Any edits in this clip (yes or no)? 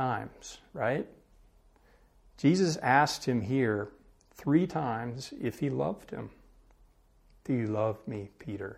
no